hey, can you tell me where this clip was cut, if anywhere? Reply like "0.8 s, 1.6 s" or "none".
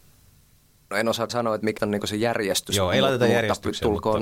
1.3 s, 1.8 s